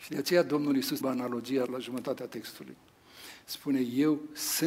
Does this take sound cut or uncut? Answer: cut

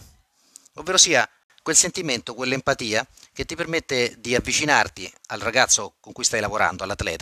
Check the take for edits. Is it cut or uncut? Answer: uncut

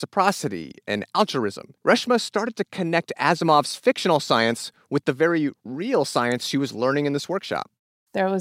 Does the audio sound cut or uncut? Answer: cut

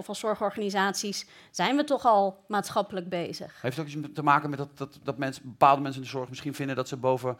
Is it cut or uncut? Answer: uncut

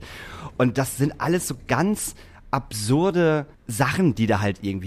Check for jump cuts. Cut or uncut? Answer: uncut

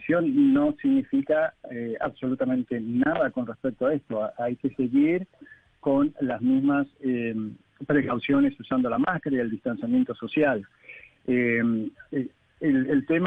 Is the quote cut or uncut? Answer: uncut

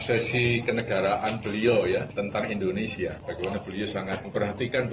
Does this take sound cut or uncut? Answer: uncut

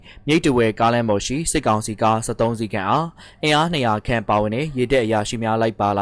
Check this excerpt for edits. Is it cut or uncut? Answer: uncut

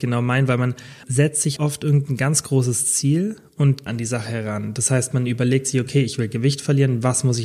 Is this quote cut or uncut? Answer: cut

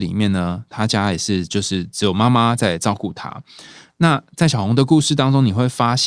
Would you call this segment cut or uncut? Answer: uncut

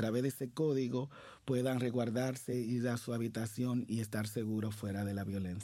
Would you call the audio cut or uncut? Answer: uncut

